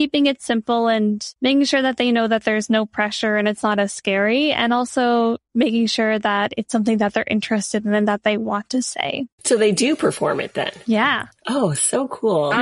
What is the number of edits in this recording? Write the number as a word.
one